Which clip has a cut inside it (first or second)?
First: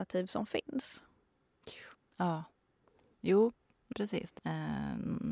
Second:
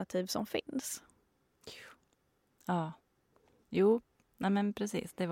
first